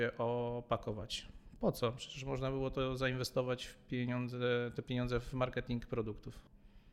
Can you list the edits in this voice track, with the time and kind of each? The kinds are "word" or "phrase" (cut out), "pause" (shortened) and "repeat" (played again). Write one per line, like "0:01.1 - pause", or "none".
none